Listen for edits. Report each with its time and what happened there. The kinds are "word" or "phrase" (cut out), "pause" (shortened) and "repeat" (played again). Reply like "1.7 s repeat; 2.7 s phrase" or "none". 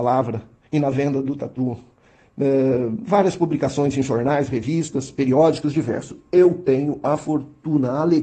none